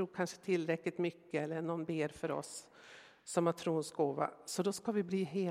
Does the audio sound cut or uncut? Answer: uncut